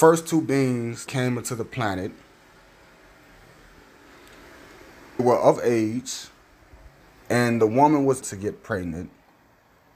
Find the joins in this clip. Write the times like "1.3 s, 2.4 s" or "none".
1.1 s, 5.2 s, 7.0 s, 8.2 s